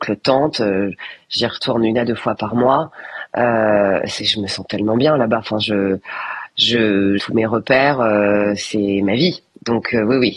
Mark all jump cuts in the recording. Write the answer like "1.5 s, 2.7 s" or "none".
7.2 s